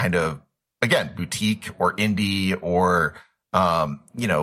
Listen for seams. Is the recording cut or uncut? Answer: uncut